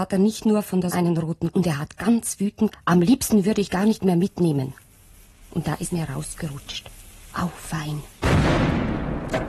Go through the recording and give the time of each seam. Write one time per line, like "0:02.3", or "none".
0:00.9
0:01.5
0:02.7
0:03.7
0:05.9